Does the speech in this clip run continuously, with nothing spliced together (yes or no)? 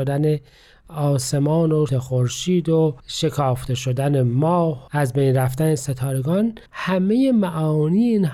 no